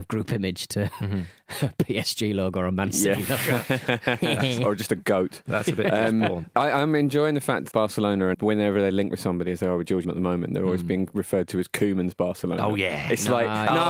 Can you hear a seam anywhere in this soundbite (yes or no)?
yes